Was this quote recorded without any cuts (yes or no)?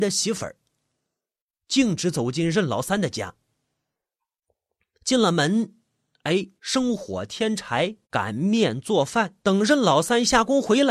no